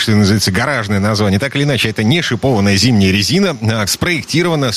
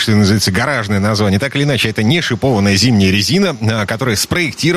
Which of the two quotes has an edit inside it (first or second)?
first